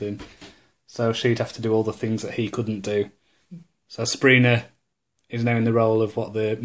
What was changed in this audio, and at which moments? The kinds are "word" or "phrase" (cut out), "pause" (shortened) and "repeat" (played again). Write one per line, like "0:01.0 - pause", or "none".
none